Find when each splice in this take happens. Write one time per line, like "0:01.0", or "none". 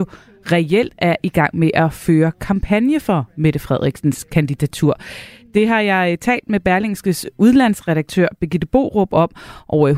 none